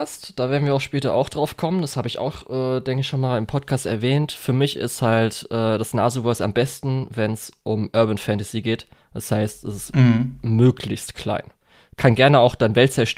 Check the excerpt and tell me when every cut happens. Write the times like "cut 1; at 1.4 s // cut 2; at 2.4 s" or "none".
none